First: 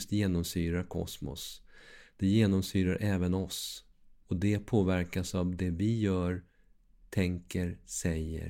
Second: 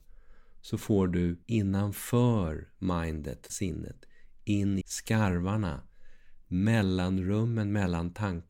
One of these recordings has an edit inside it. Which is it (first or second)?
second